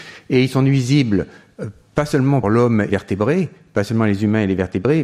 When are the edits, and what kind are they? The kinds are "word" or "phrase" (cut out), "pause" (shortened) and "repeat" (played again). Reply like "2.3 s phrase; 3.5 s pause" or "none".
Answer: 2.4 s word; 2.9 s phrase

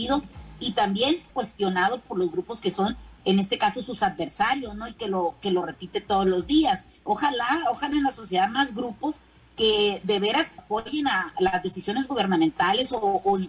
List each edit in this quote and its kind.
1.3 s word; 7.9 s word; 10.6 s word

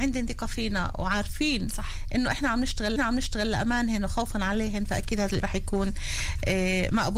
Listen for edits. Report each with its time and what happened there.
3.0 s repeat; 5.4 s word

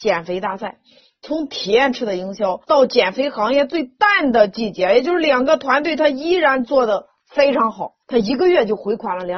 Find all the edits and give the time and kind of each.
2.6 s pause; 8.0 s pause

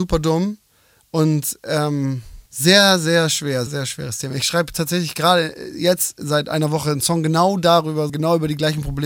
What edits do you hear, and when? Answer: 2.5 s pause; 3.7 s word; 8.1 s word

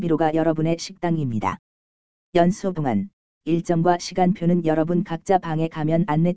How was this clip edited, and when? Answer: 2.7 s word; 3.4 s word

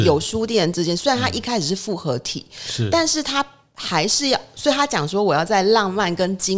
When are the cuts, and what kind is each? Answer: none

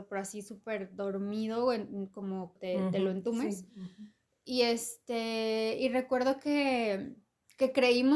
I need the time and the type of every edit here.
2.6 s phrase

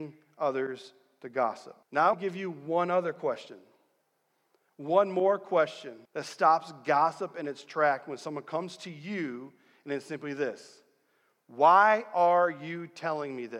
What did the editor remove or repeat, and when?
1.8 s pause; 2.1 s word; 6.1 s pause

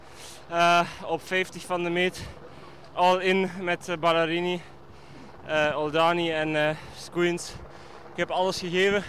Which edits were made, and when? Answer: none

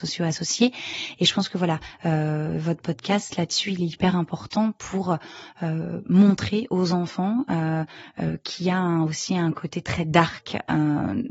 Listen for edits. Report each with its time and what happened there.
none

